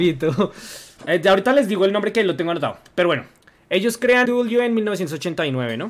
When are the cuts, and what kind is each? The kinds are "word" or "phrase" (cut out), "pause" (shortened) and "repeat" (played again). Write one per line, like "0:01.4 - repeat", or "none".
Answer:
0:01.0 - word
0:04.3 - word